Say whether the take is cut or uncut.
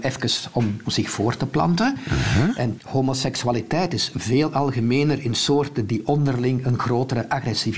cut